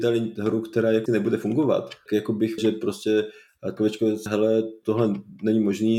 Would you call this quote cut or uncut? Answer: cut